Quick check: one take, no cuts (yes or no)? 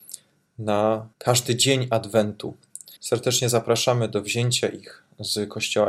no